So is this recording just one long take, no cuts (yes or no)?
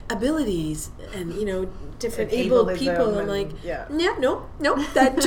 yes